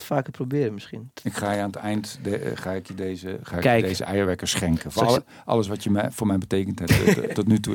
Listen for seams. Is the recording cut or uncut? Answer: uncut